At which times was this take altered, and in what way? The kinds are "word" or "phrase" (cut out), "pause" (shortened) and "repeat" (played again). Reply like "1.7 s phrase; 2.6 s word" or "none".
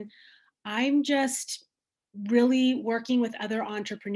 none